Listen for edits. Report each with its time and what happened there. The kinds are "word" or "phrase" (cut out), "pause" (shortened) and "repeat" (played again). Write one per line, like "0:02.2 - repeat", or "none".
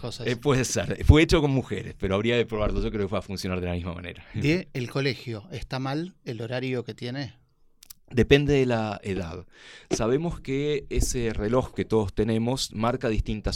none